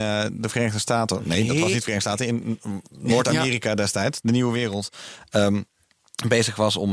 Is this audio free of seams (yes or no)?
yes